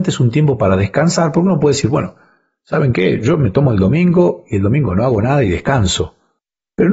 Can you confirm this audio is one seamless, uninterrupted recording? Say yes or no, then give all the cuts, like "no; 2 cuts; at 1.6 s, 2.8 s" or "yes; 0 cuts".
yes; 0 cuts